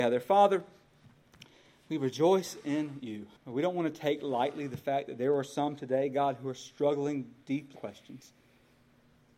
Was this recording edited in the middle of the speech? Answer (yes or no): yes